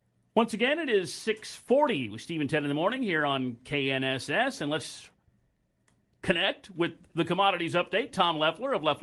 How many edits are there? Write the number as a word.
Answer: zero